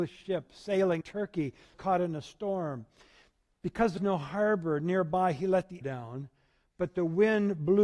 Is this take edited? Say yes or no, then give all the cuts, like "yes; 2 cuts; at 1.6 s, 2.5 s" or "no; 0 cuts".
yes; 4 cuts; at 1.0 s, 1.7 s, 4.0 s, 5.8 s